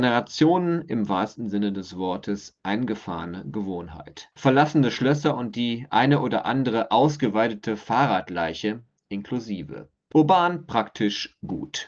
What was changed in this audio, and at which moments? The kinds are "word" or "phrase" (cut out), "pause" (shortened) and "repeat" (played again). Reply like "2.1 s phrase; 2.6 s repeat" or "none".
4.3 s pause

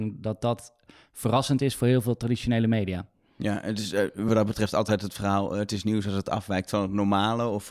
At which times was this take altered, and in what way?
none

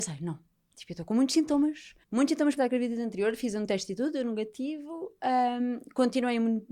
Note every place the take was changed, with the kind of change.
2.0 s pause; 2.6 s word

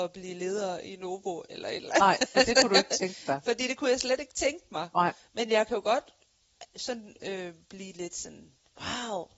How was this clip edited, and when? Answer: none

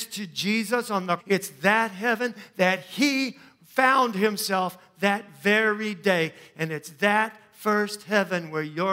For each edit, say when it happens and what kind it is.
1.2 s word

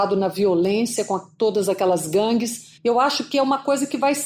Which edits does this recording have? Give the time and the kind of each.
2.8 s pause

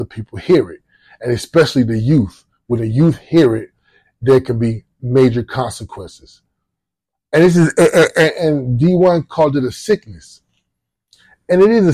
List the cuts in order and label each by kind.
none

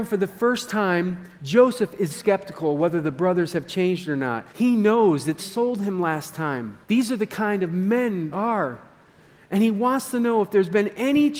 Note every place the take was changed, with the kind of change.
1.3 s pause; 2.1 s word; 4.5 s pause; 5.4 s word; 6.8 s pause; 8.3 s word

